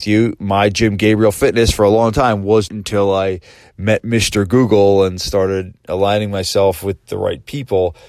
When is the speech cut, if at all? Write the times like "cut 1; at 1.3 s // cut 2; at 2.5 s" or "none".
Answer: cut 1; at 2.7 s